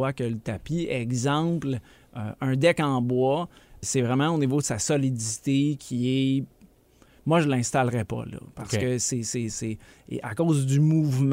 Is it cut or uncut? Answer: uncut